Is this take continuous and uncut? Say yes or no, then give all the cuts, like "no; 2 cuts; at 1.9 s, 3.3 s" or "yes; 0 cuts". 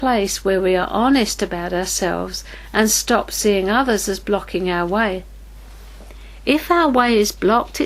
yes; 0 cuts